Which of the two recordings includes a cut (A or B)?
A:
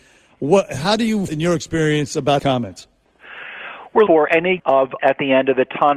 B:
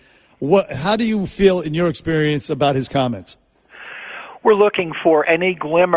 A